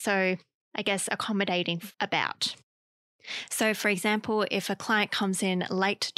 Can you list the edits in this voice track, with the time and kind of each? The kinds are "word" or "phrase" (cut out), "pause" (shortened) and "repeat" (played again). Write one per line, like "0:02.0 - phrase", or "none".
0:01.9 - pause